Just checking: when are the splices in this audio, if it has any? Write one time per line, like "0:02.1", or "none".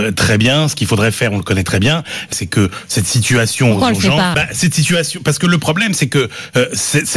0:02.3
0:04.3